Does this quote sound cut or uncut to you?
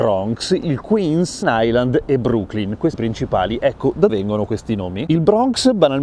cut